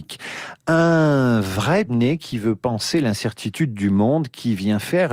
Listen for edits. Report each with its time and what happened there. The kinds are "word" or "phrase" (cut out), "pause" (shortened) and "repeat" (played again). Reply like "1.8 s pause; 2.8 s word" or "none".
1.9 s word